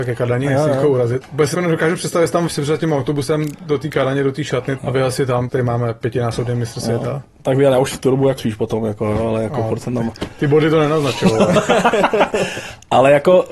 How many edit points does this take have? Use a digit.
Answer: 6